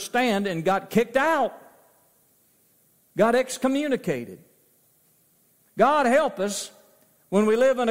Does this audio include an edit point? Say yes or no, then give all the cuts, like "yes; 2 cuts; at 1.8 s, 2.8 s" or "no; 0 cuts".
no; 0 cuts